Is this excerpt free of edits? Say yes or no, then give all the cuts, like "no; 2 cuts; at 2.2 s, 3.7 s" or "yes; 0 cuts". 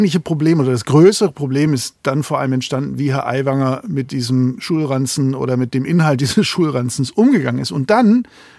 yes; 0 cuts